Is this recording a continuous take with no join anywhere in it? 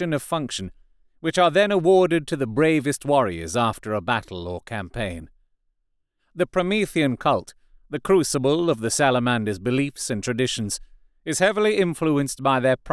yes; 0 cuts

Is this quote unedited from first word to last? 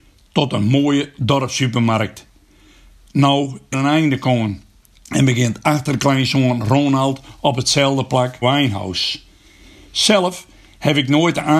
no; 2 cuts; at 3.7 s, 8.4 s

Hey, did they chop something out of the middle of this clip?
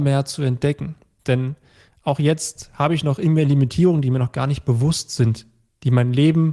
no; 0 cuts

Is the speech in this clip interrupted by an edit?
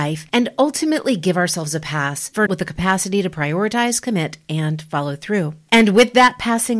yes; 1 cut; at 2.5 s

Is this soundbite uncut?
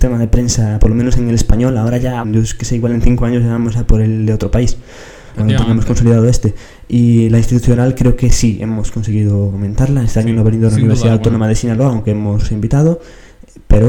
no; 2 cuts; at 2.2 s, 5.3 s

